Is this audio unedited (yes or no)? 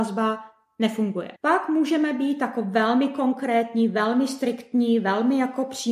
no